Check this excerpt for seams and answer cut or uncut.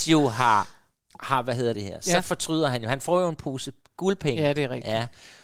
cut